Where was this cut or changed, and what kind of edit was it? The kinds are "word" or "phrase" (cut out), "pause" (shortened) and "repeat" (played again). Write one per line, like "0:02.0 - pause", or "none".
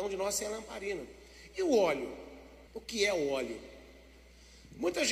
0:02.7 - pause